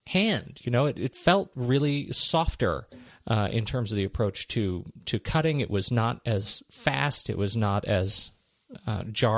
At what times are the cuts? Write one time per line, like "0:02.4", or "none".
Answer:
0:03.1